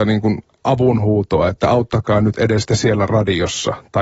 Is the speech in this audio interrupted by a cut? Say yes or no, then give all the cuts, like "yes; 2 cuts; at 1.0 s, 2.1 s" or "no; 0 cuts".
no; 0 cuts